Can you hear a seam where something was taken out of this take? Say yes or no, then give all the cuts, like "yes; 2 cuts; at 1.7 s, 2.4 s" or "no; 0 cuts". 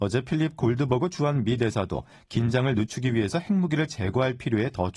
no; 0 cuts